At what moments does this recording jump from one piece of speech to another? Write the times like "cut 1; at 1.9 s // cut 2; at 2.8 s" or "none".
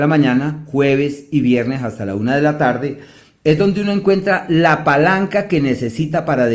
none